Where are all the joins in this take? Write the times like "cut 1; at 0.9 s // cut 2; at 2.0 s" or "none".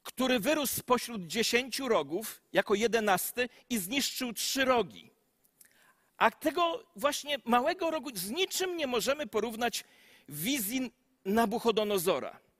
none